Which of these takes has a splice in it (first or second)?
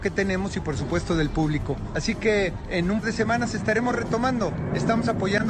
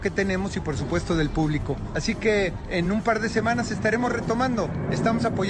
first